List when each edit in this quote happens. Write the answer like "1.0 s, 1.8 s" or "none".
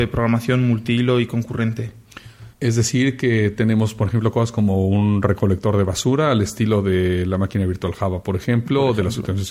2.5 s